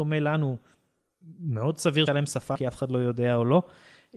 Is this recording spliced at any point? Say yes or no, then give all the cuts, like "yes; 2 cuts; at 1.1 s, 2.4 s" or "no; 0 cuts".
yes; 2 cuts; at 2.1 s, 2.5 s